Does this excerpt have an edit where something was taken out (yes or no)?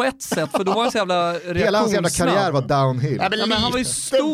no